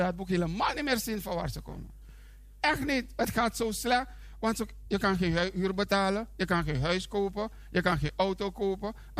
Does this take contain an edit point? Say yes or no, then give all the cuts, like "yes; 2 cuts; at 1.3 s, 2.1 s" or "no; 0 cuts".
no; 0 cuts